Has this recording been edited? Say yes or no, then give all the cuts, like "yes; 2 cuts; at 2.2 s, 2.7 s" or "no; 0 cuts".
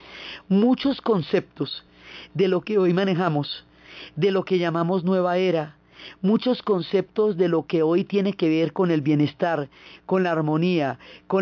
no; 0 cuts